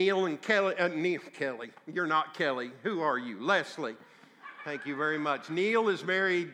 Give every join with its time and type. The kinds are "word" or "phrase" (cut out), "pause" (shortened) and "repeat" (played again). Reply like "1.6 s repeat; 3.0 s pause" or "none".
none

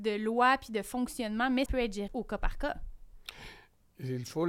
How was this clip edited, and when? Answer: 1.7 s word; 2.1 s word

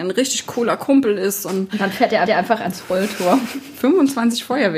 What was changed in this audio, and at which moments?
2.2 s repeat

